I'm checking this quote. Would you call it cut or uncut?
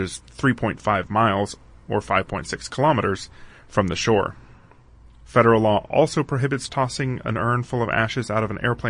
uncut